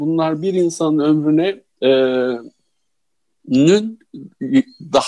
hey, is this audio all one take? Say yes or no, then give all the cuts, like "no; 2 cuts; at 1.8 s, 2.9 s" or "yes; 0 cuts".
yes; 0 cuts